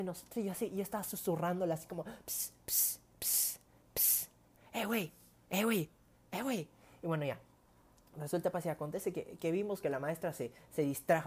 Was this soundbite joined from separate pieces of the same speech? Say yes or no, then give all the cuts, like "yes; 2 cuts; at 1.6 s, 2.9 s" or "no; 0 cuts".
no; 0 cuts